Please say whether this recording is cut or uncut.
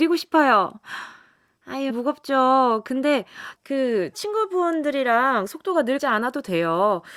cut